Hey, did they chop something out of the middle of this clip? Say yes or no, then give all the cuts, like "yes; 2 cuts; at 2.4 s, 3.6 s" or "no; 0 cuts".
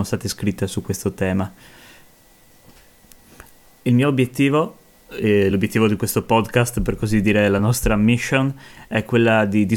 no; 0 cuts